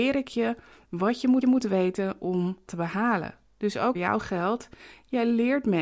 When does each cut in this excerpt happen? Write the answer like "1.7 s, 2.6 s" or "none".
1.4 s, 2.7 s, 3.9 s